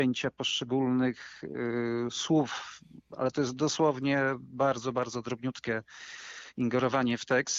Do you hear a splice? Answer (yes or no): no